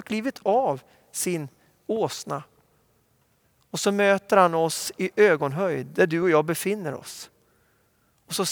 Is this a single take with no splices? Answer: yes; 0 cuts

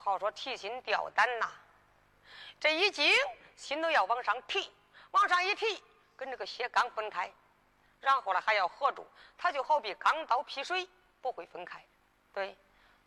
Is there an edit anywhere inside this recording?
no; 0 cuts

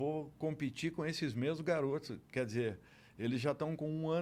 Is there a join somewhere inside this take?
no; 0 cuts

